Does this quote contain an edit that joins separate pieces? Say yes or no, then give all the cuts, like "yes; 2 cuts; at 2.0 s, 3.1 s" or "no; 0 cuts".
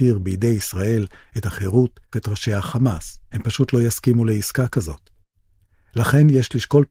yes; 2 cuts; at 2.1 s, 3.2 s